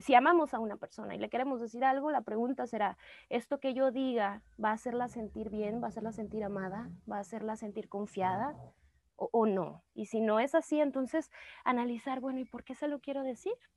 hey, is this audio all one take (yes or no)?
yes